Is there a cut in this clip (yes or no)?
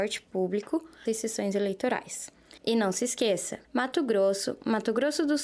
yes